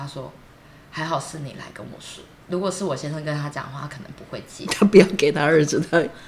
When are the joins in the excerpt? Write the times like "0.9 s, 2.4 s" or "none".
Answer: 2.4 s